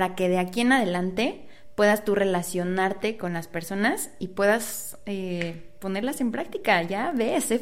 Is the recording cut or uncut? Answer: uncut